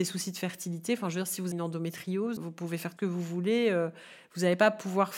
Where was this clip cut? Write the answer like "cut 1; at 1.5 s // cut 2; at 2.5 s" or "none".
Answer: cut 1; at 1.5 s // cut 2; at 2.4 s // cut 3; at 3.0 s